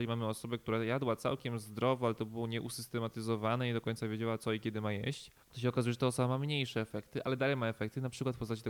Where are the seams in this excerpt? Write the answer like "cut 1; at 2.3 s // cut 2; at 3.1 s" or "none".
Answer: cut 1; at 5.4 s